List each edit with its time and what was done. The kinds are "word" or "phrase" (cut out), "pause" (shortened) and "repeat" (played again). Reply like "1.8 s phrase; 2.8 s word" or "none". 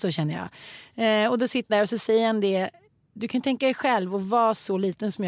1.7 s word